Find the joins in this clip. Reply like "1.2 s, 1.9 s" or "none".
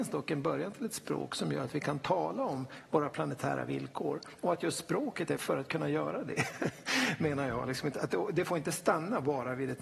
5.4 s